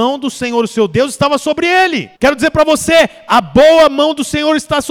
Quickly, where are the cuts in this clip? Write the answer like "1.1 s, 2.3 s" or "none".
2.2 s